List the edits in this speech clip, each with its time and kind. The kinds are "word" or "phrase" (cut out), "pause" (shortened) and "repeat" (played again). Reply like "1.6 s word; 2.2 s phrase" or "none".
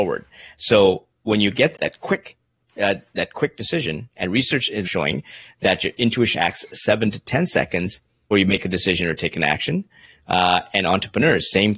1.7 s word; 4.8 s word; 6.3 s word; 8.3 s word